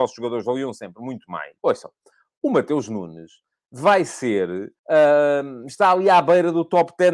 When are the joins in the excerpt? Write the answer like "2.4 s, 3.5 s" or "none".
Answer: 1.6 s, 4.8 s